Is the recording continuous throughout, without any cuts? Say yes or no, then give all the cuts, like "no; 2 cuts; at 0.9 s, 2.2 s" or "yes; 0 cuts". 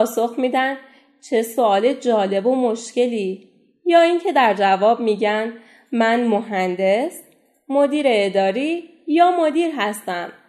yes; 0 cuts